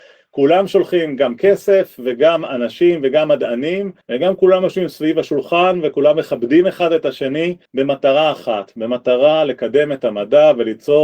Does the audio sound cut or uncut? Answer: cut